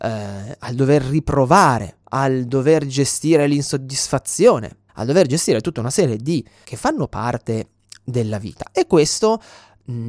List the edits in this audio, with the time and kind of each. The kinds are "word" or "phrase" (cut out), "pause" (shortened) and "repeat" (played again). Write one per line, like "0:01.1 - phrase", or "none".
0:02.0 - pause
0:04.9 - pause
0:06.6 - phrase